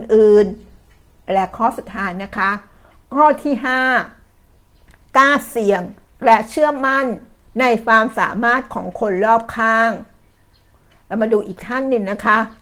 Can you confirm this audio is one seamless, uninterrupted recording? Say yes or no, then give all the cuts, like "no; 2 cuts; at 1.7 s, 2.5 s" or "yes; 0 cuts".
yes; 0 cuts